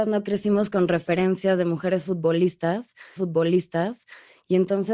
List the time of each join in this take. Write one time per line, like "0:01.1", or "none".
0:03.2